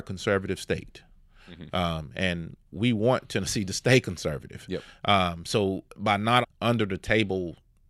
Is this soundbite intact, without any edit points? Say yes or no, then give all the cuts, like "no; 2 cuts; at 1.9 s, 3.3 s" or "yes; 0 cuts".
no; 3 cuts; at 2.6 s, 5.9 s, 6.4 s